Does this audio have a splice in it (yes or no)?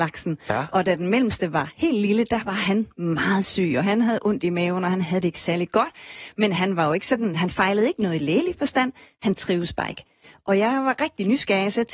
no